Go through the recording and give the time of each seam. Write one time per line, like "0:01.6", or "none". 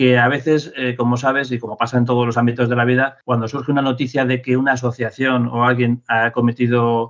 none